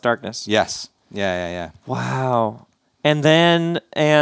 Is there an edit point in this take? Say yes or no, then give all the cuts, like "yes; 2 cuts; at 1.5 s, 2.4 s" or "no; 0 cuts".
no; 0 cuts